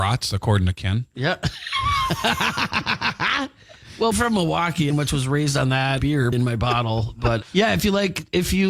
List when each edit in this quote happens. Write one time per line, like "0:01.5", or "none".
0:04.1
0:04.9
0:06.0
0:06.3
0:07.4